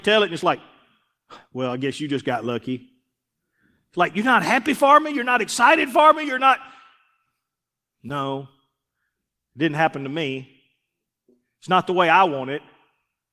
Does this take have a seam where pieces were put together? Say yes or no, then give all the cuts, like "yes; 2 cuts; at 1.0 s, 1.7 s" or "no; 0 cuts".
no; 0 cuts